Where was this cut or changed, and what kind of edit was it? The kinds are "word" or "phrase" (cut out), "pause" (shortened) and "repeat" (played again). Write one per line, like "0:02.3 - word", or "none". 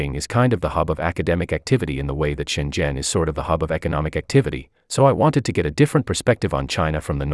none